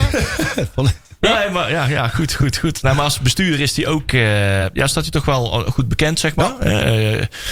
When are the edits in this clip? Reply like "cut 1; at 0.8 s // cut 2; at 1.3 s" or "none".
none